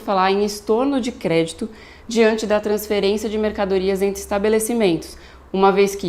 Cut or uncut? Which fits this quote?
uncut